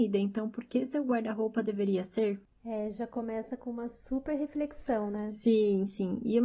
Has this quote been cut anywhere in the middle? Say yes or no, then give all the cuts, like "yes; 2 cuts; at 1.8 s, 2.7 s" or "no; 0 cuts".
no; 0 cuts